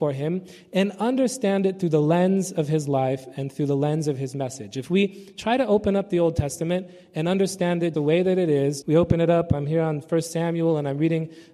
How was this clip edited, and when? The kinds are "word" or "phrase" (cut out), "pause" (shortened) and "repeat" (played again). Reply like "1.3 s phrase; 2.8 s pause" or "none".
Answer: 7.9 s word; 8.8 s word